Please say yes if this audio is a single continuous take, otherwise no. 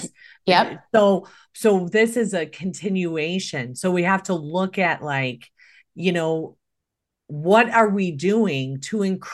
yes